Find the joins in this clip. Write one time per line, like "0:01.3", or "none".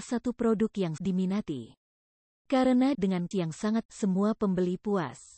0:01.0
0:02.9
0:03.3
0:03.9

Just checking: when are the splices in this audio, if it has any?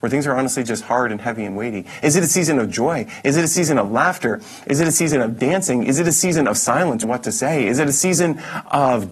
0:07.0

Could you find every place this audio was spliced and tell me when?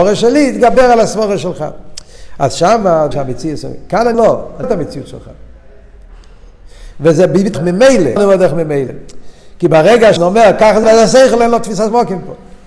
0:03.1
0:04.1
0:04.6
0:07.5
0:08.2
0:10.2
0:10.8

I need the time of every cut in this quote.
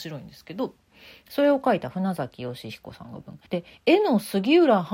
0:03.5

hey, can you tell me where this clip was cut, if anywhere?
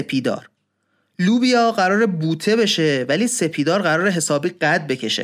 none

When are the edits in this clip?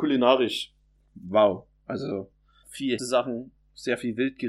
0:02.6
0:03.0

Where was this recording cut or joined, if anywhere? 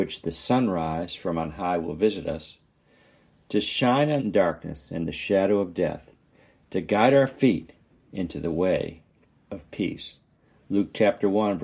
0:04.2

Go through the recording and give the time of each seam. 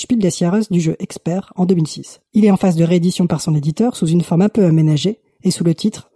0:02.3

